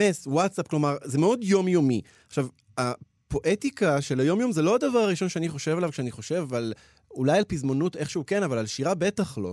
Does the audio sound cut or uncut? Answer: uncut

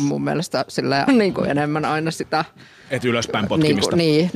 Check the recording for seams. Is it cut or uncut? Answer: cut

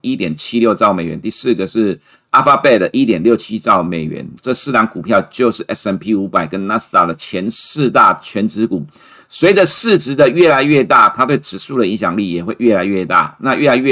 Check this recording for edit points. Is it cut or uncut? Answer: uncut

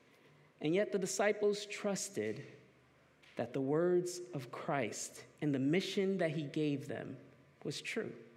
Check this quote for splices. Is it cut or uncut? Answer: uncut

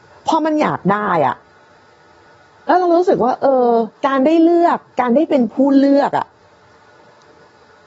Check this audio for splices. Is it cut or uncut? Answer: cut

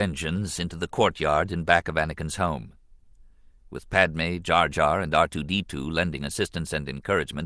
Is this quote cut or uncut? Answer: uncut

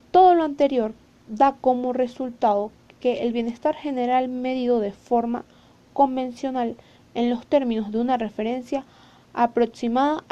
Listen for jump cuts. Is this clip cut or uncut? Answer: uncut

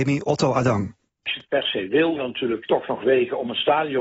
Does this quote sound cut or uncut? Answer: cut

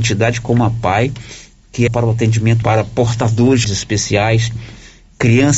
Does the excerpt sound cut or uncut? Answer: cut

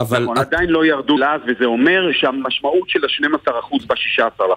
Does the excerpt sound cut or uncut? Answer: cut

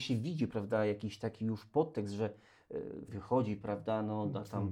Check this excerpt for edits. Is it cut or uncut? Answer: cut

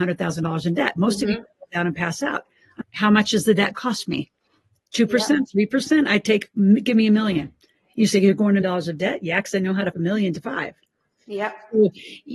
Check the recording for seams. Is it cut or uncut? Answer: cut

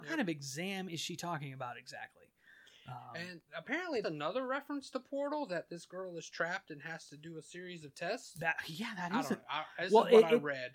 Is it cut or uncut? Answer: cut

